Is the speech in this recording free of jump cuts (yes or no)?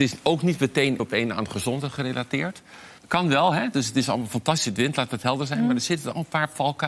no